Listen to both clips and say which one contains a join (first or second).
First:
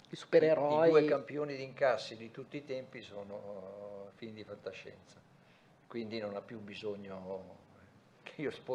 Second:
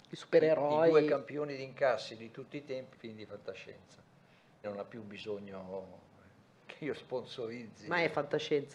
second